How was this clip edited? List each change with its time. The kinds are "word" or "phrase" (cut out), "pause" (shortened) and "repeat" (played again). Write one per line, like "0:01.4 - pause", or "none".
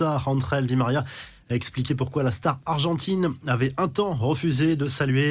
none